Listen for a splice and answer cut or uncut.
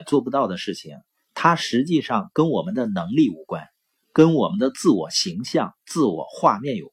uncut